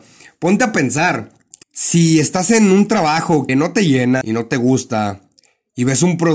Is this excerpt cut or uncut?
cut